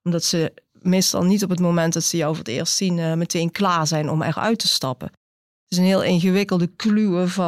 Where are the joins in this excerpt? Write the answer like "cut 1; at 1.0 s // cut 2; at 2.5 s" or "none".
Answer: none